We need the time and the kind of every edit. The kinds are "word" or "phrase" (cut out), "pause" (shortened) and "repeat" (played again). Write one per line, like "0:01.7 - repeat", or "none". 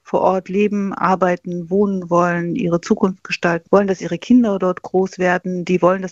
0:03.7 - word